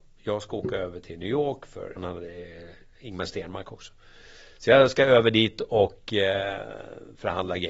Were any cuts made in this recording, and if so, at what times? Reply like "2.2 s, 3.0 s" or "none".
2.0 s, 2.9 s

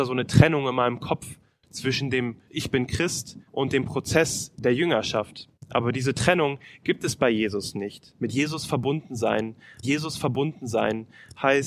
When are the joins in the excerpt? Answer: 2.5 s, 3.5 s, 5.6 s, 9.8 s

